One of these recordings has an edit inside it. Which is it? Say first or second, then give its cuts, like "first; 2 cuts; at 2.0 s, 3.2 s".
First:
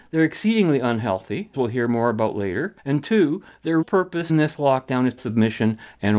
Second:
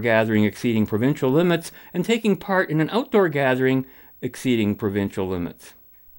first; 5 cuts; at 1.5 s, 2.8 s, 3.8 s, 4.3 s, 5.2 s